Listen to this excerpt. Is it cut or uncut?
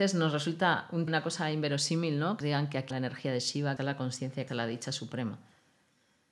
cut